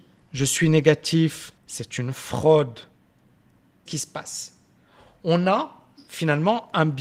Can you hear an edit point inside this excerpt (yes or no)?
yes